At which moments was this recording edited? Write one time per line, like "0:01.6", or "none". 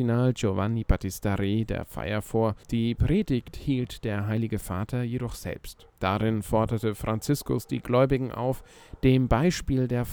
0:02.6
0:05.9